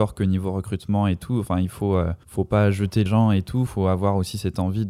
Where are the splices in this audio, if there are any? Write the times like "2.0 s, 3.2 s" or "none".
2.2 s, 3.1 s, 3.7 s